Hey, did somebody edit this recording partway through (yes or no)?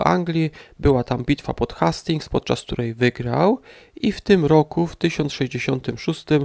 no